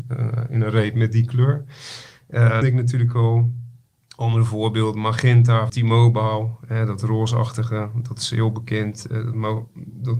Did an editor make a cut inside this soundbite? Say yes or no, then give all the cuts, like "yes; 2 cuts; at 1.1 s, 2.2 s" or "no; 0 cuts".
yes; 2 cuts; at 2.6 s, 5.7 s